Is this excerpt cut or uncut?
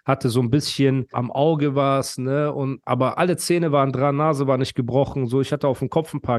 cut